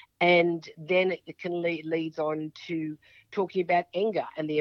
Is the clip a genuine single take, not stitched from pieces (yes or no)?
yes